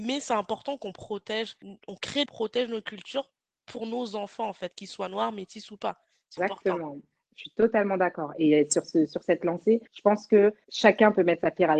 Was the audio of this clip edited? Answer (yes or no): yes